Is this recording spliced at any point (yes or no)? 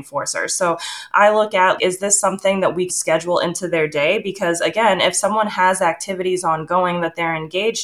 yes